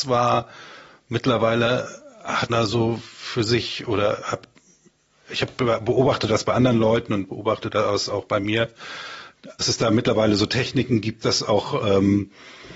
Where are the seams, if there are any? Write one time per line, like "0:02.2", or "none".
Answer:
0:02.5
0:09.6
0:11.2